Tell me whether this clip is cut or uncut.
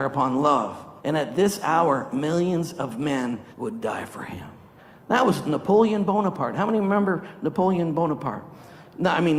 cut